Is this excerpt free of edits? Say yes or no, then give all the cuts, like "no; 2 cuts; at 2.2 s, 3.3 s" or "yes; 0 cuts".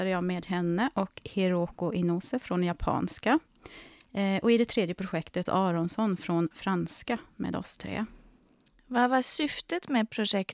no; 1 cut; at 5.5 s